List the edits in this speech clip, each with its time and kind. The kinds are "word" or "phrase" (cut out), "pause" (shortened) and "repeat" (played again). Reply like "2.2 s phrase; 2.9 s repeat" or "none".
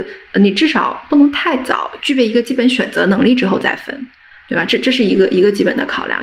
none